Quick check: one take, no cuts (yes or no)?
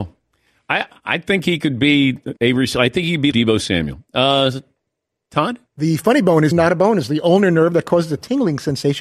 no